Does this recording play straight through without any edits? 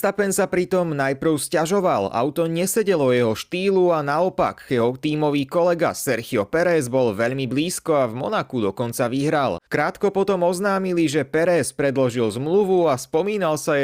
no; 1 cut; at 9.7 s

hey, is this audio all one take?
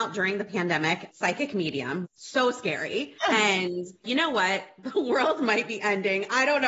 no; 4 cuts; at 1.1 s, 2.0 s, 3.2 s, 4.0 s

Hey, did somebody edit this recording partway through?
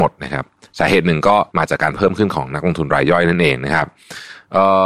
yes; 1 cut; at 1.5 s

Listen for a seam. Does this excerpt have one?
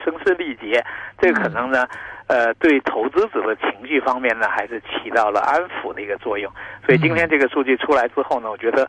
no; 0 cuts

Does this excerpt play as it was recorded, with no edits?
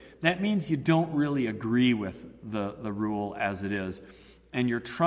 yes; 0 cuts

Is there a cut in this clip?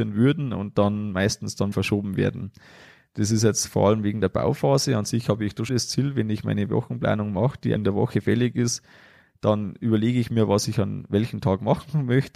yes; 3 cuts; at 1.7 s, 5.7 s, 7.8 s

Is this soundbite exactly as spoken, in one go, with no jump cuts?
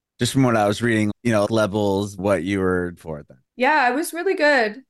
no; 5 cuts; at 1.1 s, 1.4 s, 2.2 s, 3.0 s, 3.5 s

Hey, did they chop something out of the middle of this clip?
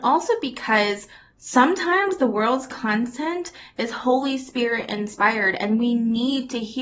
no; 0 cuts

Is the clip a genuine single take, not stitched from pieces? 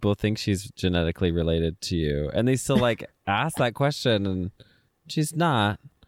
yes; 0 cuts

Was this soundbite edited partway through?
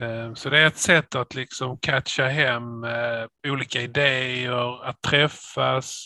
yes; 1 cut; at 3.4 s

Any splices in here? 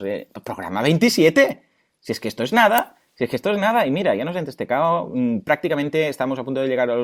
no; 0 cuts

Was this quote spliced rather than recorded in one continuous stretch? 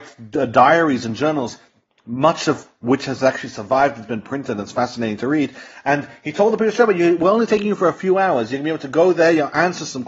no; 0 cuts

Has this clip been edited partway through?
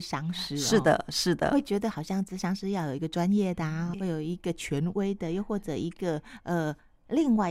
yes; 1 cut; at 3.9 s

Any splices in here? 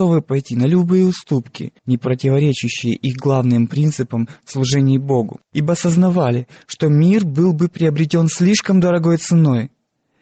yes; 2 cuts; at 1.8 s, 5.4 s

